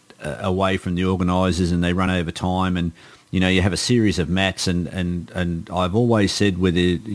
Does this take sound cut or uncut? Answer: uncut